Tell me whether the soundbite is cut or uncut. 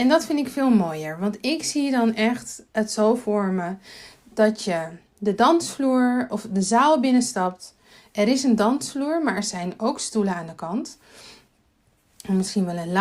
uncut